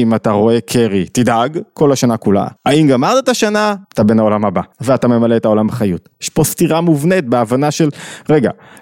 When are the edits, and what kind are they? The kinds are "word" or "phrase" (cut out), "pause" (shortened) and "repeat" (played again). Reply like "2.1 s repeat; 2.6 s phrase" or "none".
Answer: 2.6 s pause; 3.8 s pause; 4.7 s pause